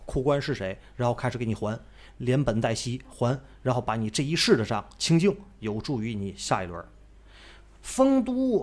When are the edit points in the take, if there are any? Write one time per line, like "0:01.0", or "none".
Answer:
none